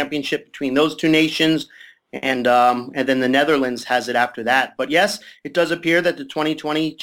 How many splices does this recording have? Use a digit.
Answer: 0